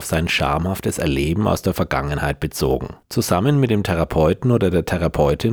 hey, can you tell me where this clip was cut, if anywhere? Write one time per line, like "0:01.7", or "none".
0:03.0